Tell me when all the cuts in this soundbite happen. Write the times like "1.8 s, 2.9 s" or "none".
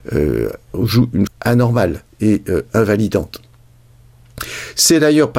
1.3 s